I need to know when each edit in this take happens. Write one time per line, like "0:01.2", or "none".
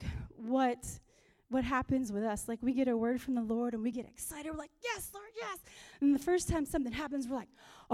none